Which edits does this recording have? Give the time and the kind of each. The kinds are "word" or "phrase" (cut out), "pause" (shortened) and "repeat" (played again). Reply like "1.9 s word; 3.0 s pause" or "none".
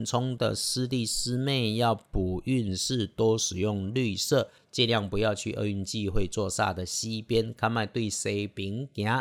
none